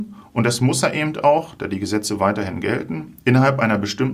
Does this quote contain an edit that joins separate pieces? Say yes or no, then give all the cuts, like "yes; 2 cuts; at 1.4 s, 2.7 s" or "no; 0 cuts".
no; 0 cuts